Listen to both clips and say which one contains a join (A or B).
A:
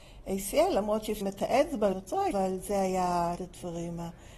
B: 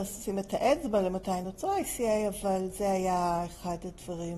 A